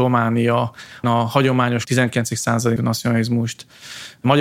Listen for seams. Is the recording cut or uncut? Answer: cut